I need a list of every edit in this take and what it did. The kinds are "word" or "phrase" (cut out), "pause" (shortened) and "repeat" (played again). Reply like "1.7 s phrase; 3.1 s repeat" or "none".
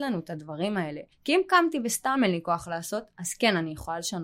1.1 s pause